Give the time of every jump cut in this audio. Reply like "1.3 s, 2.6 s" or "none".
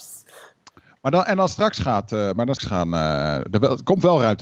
2.6 s